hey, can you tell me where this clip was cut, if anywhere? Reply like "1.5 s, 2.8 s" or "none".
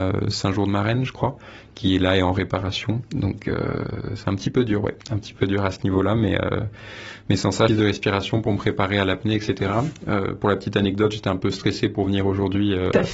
5.0 s, 7.7 s